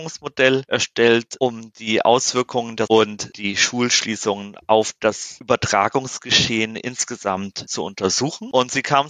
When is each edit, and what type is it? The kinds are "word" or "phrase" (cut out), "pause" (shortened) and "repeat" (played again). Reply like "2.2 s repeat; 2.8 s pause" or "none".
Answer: 2.9 s phrase